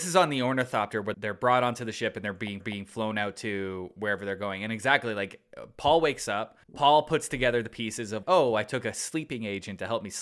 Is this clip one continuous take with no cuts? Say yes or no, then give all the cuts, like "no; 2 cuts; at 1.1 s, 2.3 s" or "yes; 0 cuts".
no; 4 cuts; at 1.1 s, 2.6 s, 6.6 s, 8.2 s